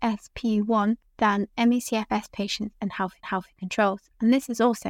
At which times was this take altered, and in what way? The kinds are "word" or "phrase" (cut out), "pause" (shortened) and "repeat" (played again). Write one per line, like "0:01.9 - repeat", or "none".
0:03.2 - repeat